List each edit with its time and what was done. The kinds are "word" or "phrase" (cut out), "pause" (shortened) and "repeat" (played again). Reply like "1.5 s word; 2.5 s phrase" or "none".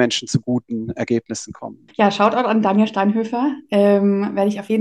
1.9 s pause